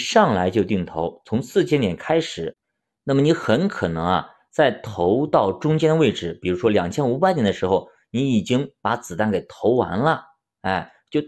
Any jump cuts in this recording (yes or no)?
no